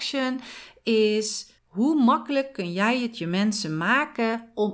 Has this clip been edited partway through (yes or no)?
yes